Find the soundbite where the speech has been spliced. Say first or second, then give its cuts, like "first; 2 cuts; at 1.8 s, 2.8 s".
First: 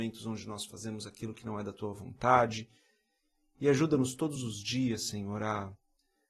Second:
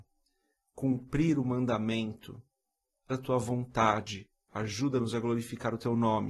second; 1 cut; at 3.1 s